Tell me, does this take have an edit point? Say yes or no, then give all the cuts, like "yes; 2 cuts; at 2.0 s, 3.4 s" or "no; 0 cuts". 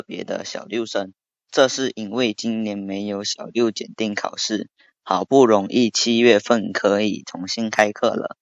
no; 0 cuts